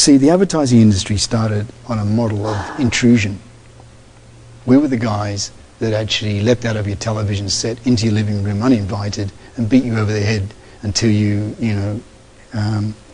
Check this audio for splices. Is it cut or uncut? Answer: uncut